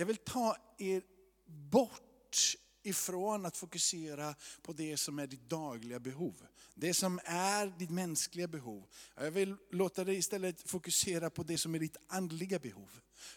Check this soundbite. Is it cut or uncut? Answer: uncut